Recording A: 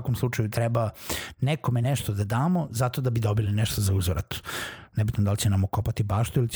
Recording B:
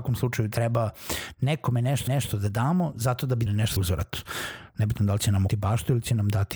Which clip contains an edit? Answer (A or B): B